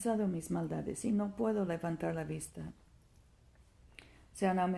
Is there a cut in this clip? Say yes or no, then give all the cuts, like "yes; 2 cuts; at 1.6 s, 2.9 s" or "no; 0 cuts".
no; 0 cuts